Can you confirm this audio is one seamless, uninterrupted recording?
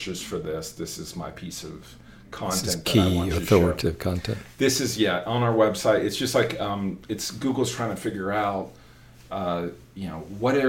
yes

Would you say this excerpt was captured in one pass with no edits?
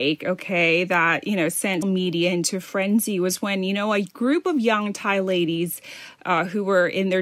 no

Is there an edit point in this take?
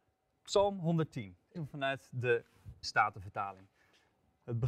yes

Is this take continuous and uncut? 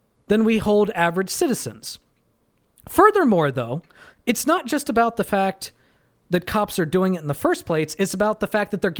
yes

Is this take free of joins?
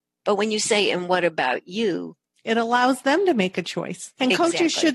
yes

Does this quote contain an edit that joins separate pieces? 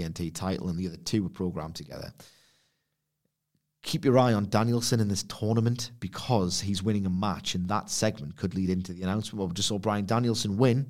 no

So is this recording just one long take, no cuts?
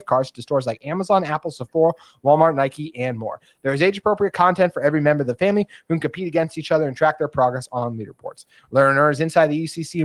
yes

